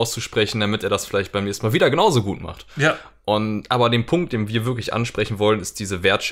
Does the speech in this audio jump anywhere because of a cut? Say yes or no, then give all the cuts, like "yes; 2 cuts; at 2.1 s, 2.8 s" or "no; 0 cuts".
no; 0 cuts